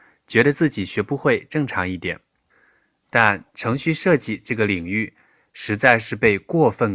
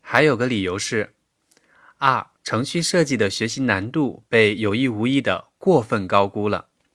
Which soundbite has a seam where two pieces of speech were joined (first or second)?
second